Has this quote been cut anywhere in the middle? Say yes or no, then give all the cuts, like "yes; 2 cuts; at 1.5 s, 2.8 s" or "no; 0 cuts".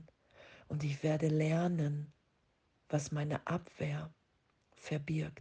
no; 0 cuts